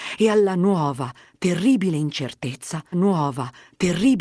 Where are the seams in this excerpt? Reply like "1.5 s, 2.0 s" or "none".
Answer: 2.9 s